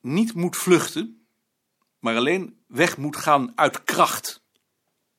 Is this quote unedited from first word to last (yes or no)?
yes